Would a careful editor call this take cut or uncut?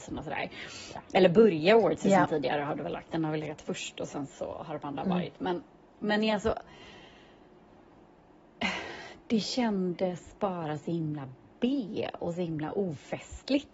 uncut